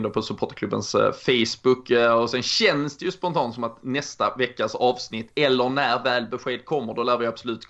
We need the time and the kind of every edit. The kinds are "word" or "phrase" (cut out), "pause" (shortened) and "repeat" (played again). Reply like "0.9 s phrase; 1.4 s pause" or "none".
none